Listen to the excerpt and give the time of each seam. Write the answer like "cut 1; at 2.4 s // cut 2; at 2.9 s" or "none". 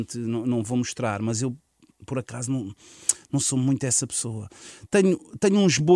none